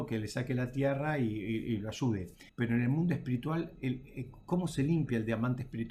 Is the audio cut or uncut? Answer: cut